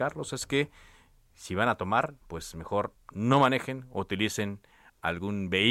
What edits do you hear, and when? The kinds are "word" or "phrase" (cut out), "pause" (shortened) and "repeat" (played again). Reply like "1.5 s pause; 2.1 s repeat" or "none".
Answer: 2.2 s pause; 3.0 s pause